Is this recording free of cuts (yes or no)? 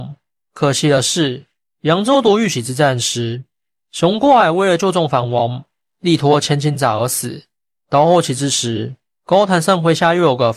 yes